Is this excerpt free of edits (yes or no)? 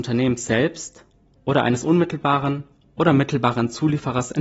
yes